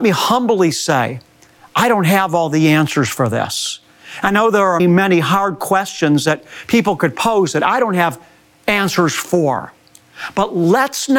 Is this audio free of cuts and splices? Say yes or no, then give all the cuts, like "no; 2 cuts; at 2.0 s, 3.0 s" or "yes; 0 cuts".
no; 1 cut; at 4.8 s